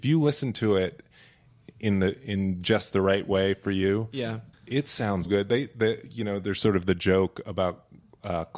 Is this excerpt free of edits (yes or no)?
no